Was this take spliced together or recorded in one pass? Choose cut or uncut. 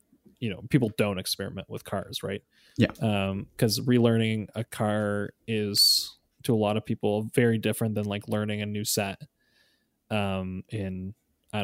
uncut